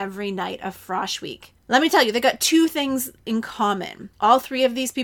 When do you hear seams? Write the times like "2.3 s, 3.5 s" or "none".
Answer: 1.6 s, 4.1 s